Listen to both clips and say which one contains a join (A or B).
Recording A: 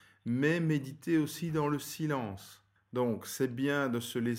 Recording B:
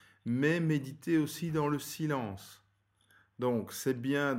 A